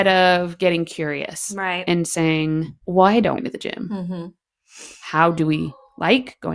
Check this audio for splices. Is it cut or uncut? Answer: cut